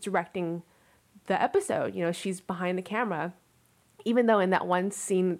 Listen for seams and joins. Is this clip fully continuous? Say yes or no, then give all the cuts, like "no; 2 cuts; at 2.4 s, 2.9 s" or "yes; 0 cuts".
yes; 0 cuts